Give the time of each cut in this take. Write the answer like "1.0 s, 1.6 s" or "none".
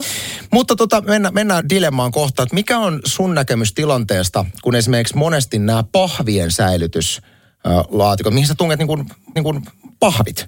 1.6 s, 2.4 s, 9.4 s

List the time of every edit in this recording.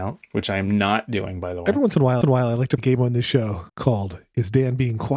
2.2 s, 2.8 s, 3.7 s

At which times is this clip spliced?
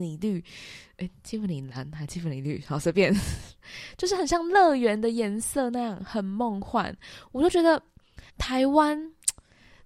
8.3 s

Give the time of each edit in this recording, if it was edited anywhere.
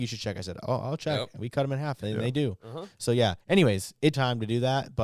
3.4 s, 4.1 s

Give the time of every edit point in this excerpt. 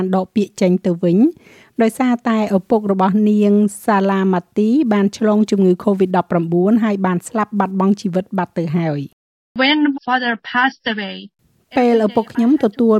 10.0 s

